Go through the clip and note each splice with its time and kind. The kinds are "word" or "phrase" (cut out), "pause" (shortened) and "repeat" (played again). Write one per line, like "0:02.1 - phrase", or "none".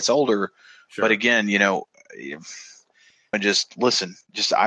0:03.3 - phrase